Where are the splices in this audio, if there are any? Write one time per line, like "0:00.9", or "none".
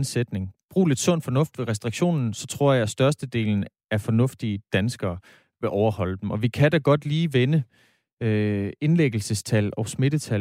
none